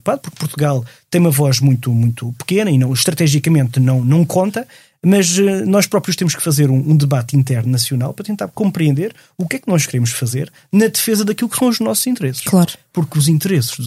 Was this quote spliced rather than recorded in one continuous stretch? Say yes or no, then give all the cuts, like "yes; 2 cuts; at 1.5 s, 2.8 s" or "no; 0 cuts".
no; 0 cuts